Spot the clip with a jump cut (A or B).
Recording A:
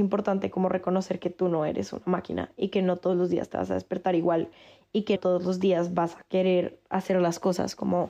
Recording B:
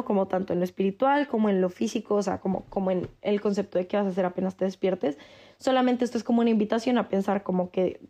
A